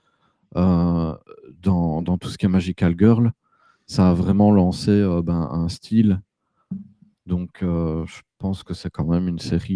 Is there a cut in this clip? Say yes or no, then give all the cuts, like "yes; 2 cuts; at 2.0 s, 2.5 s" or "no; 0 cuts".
no; 0 cuts